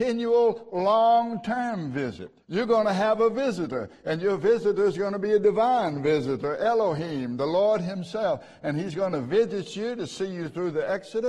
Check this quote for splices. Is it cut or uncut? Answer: cut